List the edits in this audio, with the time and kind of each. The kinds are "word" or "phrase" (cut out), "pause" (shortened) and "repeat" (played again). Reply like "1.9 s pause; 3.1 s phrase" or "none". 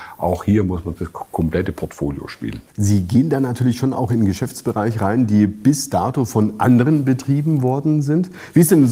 2.7 s pause